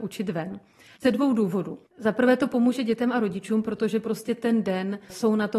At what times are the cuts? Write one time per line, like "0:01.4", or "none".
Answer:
0:01.9